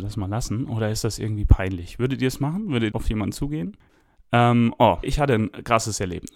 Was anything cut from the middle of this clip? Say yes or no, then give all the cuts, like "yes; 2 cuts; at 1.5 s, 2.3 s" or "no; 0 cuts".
yes; 2 cuts; at 2.9 s, 5.0 s